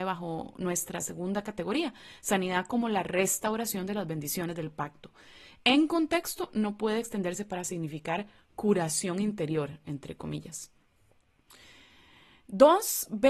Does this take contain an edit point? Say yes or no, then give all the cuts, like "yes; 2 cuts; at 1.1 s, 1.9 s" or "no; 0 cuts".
no; 0 cuts